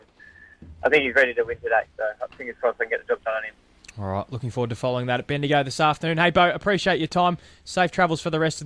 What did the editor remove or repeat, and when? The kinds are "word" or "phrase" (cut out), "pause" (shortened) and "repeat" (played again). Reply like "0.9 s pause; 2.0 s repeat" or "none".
none